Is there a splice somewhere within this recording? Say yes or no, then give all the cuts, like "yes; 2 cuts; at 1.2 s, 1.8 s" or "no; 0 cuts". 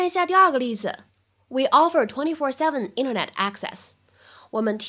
no; 0 cuts